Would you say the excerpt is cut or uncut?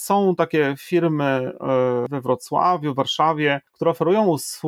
uncut